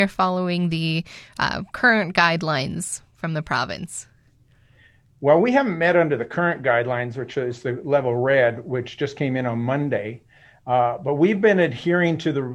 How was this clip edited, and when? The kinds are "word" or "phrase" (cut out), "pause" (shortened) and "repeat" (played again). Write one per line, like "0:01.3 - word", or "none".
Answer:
none